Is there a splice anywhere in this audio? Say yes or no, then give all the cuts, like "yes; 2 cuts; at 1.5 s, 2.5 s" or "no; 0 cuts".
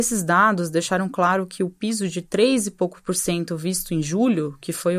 no; 0 cuts